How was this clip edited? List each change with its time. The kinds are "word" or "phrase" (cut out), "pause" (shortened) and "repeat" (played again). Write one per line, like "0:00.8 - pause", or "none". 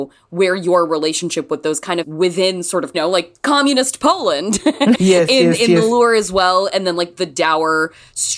0:02.0 - phrase
0:02.9 - phrase
0:04.9 - word